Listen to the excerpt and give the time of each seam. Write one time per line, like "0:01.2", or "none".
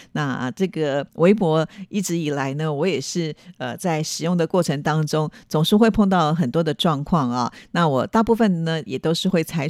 0:01.1